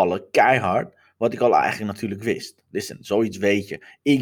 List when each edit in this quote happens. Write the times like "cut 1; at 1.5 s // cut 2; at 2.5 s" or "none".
none